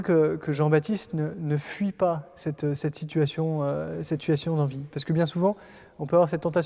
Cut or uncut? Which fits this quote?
uncut